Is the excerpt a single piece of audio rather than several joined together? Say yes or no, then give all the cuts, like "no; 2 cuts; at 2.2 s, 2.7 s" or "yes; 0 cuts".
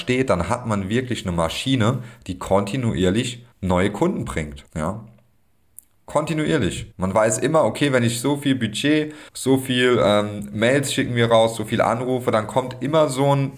no; 4 cuts; at 3.5 s, 4.7 s, 6.9 s, 9.3 s